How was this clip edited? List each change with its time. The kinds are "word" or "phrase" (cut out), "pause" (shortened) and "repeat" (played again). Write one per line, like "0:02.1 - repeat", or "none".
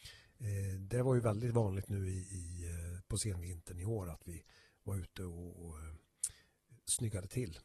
none